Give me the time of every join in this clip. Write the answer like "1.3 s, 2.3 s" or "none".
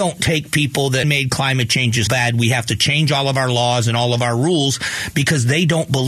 1.0 s, 2.1 s